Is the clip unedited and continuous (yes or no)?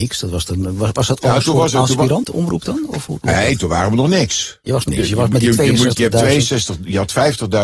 no